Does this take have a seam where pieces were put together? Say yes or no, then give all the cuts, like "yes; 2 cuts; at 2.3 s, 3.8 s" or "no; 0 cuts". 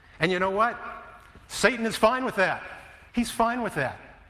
yes; 1 cut; at 3.1 s